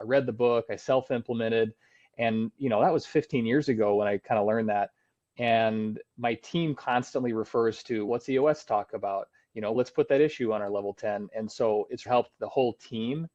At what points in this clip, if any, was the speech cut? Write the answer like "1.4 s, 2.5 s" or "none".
8.1 s, 9.7 s, 12.1 s

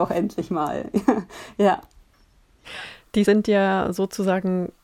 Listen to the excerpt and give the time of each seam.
3.3 s

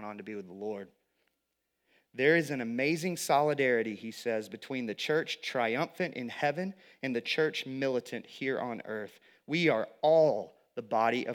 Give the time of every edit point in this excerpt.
none

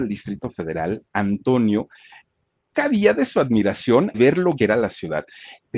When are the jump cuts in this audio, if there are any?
2.7 s, 4.1 s, 4.6 s

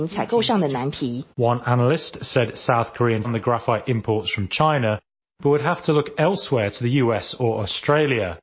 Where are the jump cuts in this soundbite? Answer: 1.3 s, 3.2 s

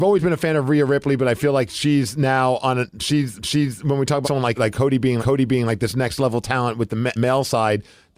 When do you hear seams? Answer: 3.4 s, 4.2 s, 4.6 s, 5.2 s, 7.2 s

